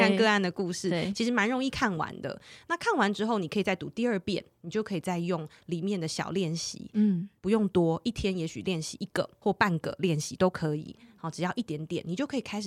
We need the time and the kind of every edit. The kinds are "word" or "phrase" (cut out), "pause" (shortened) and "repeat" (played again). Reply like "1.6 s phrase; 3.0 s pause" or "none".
none